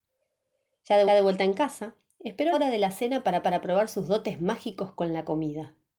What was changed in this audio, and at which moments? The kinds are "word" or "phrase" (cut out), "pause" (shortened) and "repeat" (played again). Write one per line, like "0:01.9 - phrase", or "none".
0:01.1 - repeat
0:02.5 - word
0:03.4 - repeat